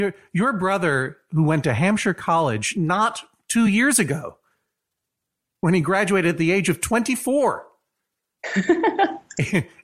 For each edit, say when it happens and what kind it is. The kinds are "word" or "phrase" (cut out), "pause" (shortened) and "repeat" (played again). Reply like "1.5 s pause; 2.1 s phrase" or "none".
none